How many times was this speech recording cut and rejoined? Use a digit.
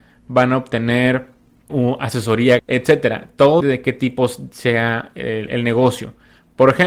3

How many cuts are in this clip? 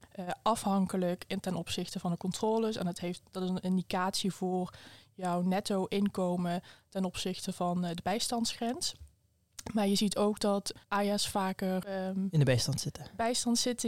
1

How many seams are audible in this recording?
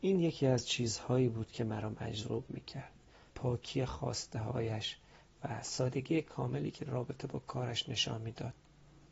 2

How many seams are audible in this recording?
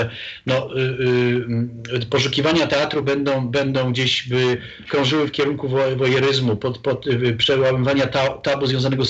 0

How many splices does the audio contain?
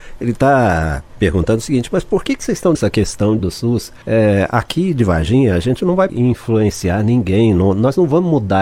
4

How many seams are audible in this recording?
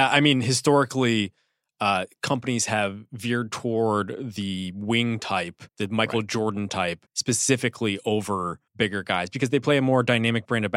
3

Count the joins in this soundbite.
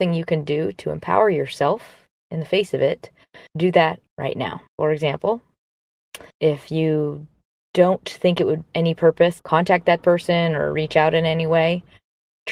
6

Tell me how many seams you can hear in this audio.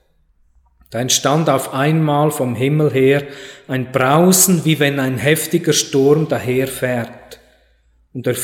0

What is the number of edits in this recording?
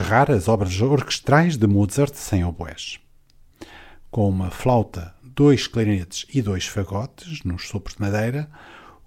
0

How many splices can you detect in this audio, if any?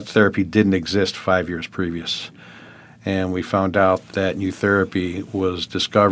1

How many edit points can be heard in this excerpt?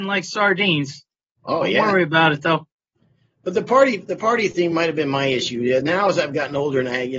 0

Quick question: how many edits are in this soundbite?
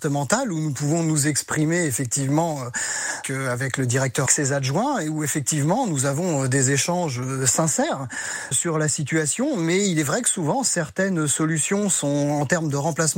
3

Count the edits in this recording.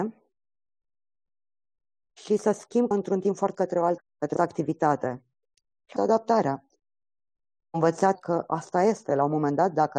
6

